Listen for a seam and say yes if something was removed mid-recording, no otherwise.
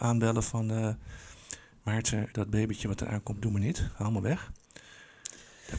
yes